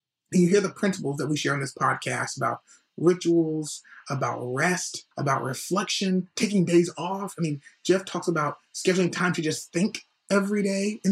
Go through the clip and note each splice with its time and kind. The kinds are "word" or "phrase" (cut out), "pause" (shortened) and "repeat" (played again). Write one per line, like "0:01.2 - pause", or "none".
0:05.1 - pause